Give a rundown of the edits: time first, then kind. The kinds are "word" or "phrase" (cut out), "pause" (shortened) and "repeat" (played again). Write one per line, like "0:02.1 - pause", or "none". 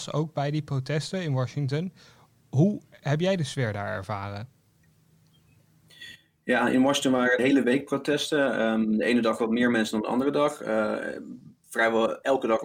0:07.4 - word